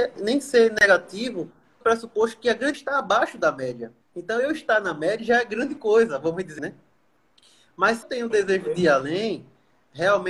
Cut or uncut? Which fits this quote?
cut